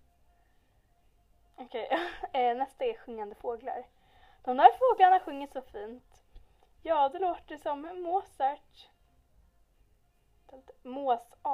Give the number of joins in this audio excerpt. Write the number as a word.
zero